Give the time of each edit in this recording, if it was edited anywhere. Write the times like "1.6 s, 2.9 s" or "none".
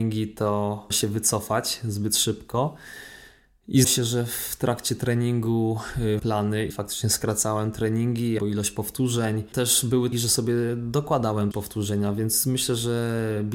0.9 s, 3.8 s, 6.2 s, 6.7 s, 8.4 s, 9.5 s, 10.1 s, 11.5 s